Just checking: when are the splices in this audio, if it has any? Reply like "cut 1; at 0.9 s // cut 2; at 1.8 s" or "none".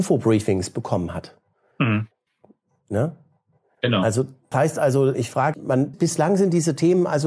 cut 1; at 4.5 s // cut 2; at 5.1 s // cut 3; at 5.5 s // cut 4; at 5.9 s